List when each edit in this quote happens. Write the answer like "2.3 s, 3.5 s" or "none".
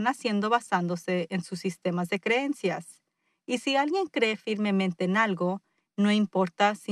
none